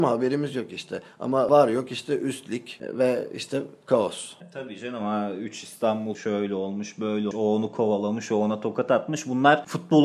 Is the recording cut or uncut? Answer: cut